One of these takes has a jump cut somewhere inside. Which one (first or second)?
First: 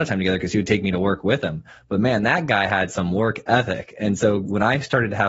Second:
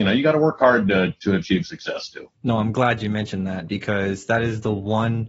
second